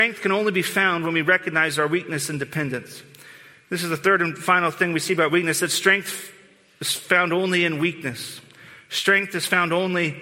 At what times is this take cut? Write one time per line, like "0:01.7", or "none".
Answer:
none

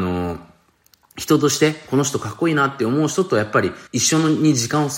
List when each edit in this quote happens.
0:03.9

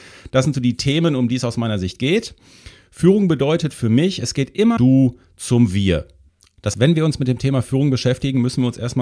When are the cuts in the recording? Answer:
0:04.8
0:06.7

